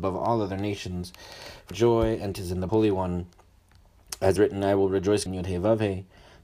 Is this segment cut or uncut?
cut